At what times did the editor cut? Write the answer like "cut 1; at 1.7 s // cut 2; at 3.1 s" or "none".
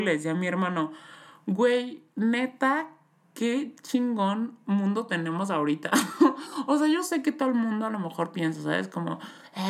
none